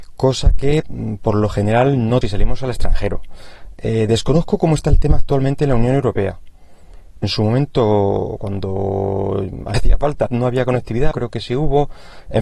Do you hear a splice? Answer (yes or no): yes